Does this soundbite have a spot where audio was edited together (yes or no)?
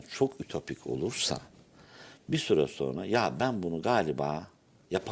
no